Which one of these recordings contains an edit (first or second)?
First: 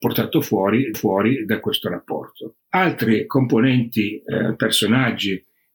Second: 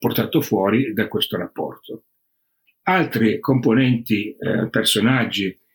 first